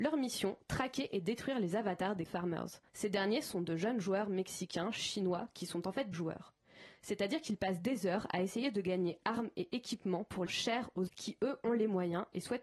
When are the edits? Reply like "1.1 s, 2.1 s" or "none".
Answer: 2.3 s, 2.9 s, 6.1 s, 10.5 s, 11.1 s